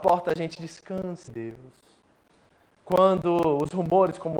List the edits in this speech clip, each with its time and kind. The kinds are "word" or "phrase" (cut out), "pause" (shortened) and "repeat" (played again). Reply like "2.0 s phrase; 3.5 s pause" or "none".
1.3 s word

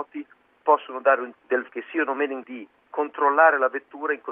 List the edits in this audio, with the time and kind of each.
1.3 s word; 1.7 s word; 2.4 s word

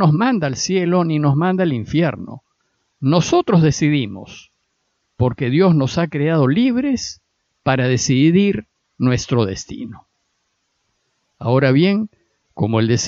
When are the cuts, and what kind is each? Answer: none

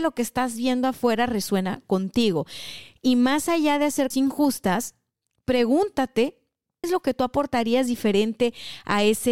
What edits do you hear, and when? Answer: 4.1 s word; 6.8 s word

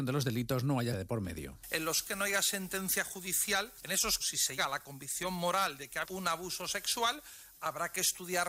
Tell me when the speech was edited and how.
0.9 s word; 2.0 s word; 4.2 s word; 4.6 s word; 6.0 s word

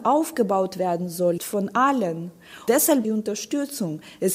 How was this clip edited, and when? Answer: 1.4 s word; 3.0 s phrase

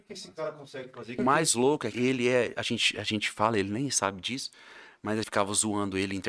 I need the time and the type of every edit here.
1.2 s word; 1.9 s word; 5.2 s word

